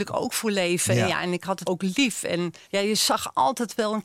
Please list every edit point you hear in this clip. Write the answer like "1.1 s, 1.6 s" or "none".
1.6 s, 2.6 s